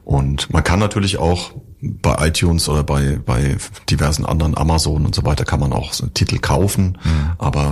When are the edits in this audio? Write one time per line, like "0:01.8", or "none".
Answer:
none

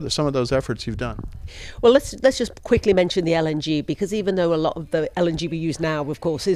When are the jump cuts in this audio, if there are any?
none

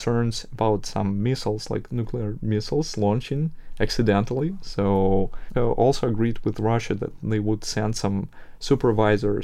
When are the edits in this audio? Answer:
0:05.5

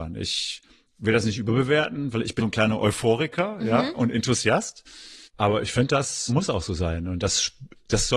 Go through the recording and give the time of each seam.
0:02.4
0:05.2
0:06.3

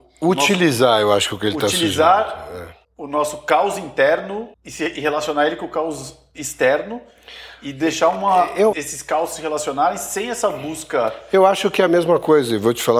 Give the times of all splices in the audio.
0:02.8
0:04.5
0:08.7

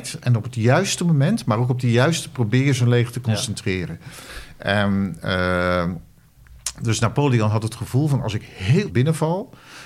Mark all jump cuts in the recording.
0:02.3
0:08.9

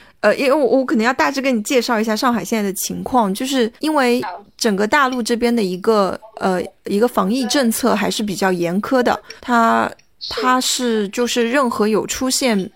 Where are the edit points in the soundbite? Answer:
0:03.8
0:09.4

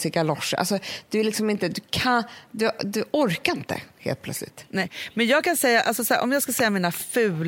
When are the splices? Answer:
none

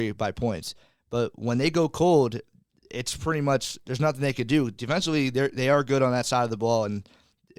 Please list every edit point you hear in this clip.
none

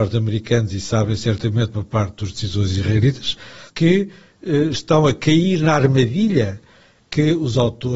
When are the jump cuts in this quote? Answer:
0:03.7

